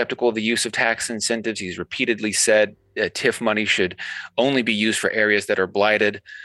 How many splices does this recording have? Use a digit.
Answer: 0